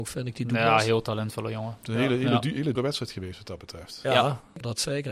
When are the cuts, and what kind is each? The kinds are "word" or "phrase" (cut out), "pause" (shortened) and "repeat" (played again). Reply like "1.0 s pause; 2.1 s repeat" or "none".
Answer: 2.8 s word